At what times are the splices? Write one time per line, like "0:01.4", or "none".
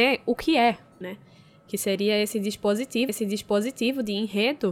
0:01.0
0:03.1